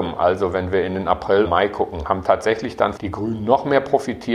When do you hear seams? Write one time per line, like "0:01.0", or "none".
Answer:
0:01.4
0:03.0